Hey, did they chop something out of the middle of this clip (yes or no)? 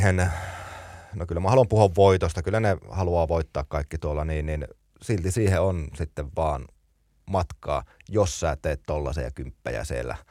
no